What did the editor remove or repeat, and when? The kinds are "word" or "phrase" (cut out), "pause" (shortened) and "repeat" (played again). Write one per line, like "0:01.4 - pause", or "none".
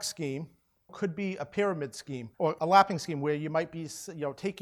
0:02.3 - pause